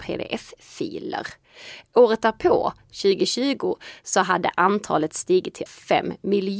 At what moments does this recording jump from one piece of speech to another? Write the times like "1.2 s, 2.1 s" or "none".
5.7 s